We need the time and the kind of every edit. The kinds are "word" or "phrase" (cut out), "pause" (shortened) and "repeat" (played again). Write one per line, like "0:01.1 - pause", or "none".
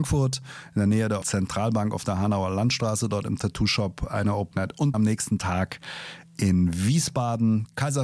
0:01.2 - word
0:04.5 - word
0:04.9 - word